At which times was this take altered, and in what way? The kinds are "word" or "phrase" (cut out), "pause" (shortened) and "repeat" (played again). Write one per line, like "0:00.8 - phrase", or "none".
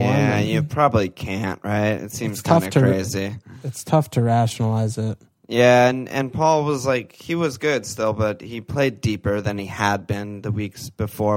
none